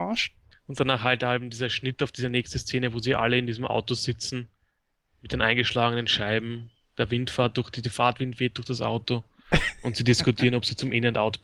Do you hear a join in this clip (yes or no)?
no